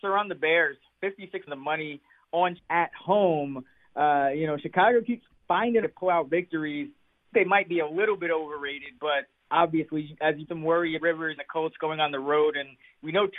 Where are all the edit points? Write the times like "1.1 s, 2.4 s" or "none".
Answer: 1.5 s, 2.6 s, 5.8 s, 7.3 s, 9.5 s, 10.4 s, 11.0 s, 11.4 s